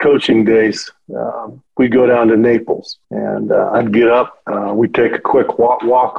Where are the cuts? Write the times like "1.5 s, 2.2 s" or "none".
1.7 s, 3.0 s, 4.4 s